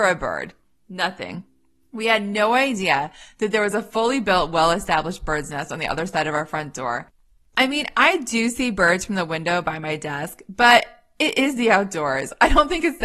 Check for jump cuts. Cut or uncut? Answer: uncut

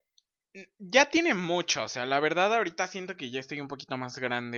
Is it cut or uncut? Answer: uncut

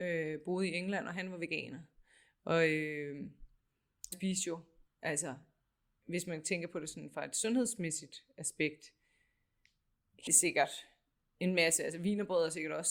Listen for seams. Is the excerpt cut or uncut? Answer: cut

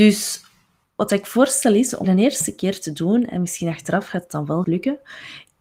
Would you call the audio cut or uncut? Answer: cut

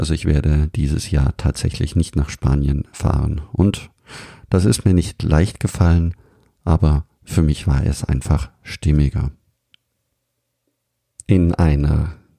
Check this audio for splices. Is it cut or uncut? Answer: uncut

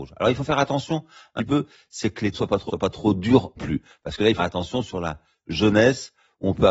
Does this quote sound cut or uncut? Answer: cut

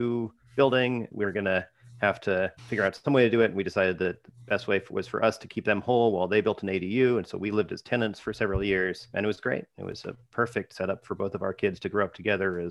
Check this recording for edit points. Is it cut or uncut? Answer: cut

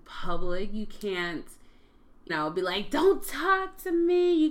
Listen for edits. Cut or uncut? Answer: cut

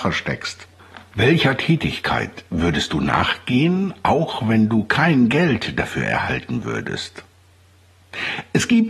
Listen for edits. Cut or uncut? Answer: uncut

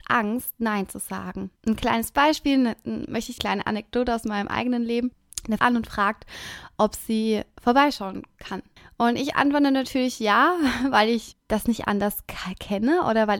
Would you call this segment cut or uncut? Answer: cut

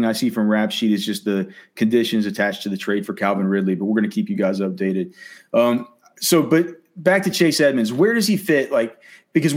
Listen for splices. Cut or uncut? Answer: uncut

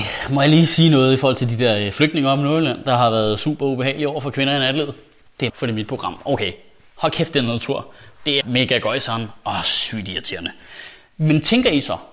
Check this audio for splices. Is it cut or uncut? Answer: cut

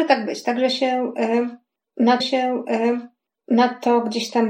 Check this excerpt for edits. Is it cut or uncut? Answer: cut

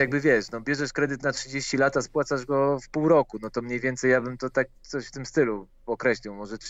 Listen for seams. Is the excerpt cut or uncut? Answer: uncut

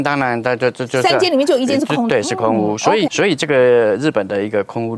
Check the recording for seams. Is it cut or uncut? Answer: cut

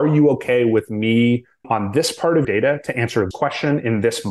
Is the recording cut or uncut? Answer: cut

